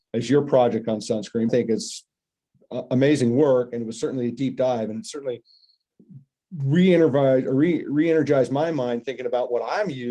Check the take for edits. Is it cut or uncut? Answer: cut